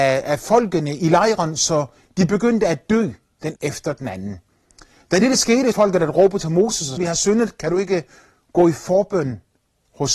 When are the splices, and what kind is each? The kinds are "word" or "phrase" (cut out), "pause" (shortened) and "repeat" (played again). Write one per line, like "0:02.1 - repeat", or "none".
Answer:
0:01.0 - word
0:03.6 - word
0:05.7 - phrase
0:07.0 - phrase